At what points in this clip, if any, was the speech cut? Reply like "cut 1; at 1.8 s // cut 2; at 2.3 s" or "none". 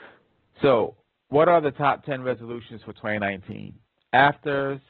none